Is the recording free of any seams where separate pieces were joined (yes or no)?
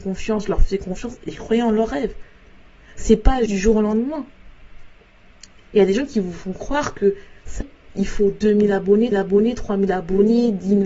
no